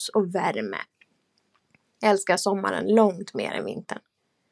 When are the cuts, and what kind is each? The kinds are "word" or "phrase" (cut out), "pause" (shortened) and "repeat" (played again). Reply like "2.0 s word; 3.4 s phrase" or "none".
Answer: none